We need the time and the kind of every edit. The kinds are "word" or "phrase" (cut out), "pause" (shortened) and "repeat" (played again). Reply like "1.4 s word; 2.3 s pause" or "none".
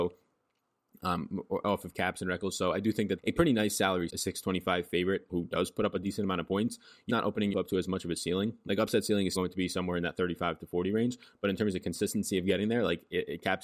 3.2 s word; 4.1 s word; 5.3 s word; 7.1 s word; 7.5 s word; 9.4 s word